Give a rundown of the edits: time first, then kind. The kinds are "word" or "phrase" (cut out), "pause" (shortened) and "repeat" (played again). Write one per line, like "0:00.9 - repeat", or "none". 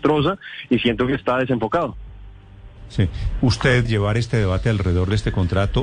0:01.2 - word
0:03.8 - word